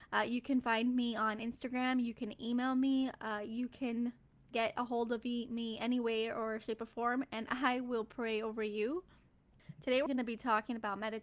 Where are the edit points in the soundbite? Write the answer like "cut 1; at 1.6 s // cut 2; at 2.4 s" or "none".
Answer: cut 1; at 10.1 s